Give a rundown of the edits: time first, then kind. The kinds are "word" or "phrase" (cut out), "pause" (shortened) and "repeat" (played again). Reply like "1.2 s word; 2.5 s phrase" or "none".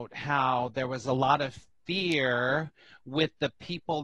none